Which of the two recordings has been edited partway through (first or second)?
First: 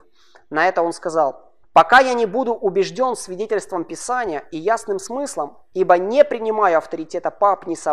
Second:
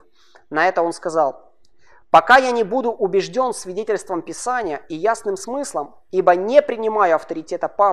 first